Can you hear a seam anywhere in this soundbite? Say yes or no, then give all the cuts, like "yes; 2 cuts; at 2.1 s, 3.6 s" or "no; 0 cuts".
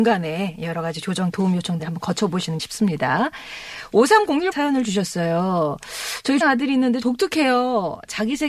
yes; 6 cuts; at 1.3 s, 1.8 s, 2.6 s, 4.5 s, 6.4 s, 7.0 s